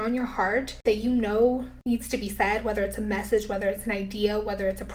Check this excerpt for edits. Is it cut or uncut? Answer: uncut